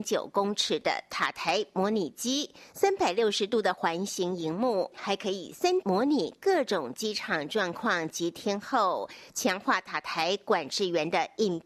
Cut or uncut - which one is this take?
cut